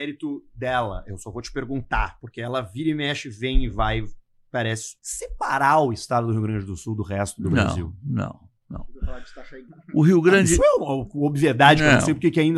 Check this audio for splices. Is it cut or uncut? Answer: cut